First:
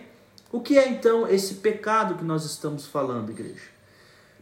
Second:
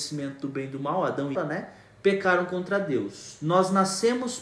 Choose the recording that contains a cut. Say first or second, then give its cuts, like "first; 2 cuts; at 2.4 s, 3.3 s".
second; 1 cut; at 1.3 s